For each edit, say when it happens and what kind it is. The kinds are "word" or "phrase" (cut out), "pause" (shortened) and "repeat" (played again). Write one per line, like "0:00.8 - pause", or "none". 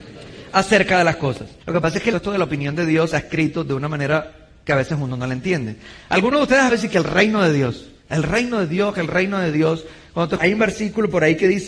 0:01.6 - pause
0:02.1 - phrase
0:03.1 - word
0:06.7 - word
0:08.0 - pause
0:10.4 - word